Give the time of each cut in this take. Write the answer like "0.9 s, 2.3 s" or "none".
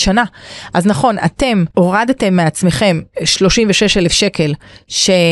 1.7 s